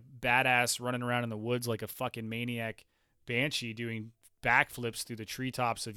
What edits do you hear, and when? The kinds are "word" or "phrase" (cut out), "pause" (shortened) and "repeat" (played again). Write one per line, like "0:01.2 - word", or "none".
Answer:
none